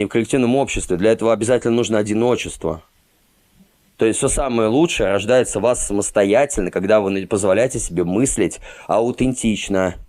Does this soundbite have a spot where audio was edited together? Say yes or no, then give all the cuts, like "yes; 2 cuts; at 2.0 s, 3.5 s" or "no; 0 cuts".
no; 0 cuts